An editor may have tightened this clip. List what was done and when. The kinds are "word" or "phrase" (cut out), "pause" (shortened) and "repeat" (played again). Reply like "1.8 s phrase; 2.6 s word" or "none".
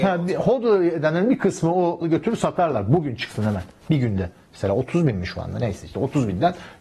2.0 s word